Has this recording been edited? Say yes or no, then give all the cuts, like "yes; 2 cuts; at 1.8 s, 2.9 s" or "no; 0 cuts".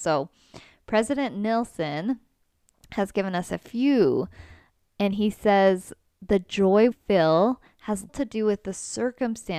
yes; 2 cuts; at 6.9 s, 8.1 s